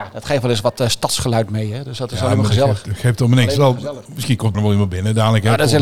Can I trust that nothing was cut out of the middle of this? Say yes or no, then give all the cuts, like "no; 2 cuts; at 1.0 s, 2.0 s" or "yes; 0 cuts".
no; 2 cuts; at 4.1 s, 4.5 s